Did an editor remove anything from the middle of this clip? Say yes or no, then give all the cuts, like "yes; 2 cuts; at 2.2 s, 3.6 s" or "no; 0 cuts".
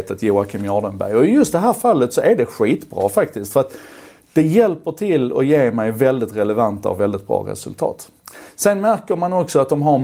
no; 0 cuts